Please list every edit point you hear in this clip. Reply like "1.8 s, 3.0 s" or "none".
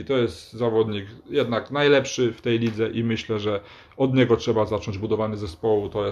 none